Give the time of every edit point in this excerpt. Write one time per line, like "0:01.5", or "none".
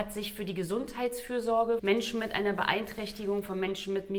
0:01.8